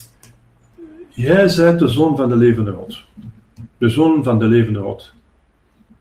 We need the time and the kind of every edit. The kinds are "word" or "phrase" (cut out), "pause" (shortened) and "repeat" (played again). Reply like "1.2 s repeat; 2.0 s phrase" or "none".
none